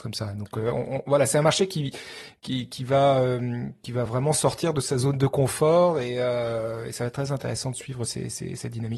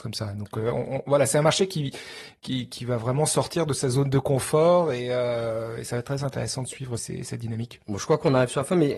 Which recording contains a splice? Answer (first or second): second